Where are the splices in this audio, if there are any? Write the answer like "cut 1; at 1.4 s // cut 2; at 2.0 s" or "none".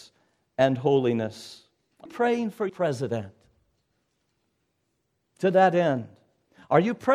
cut 1; at 2.1 s // cut 2; at 2.7 s